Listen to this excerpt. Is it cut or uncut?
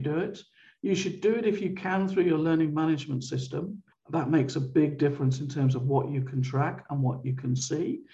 cut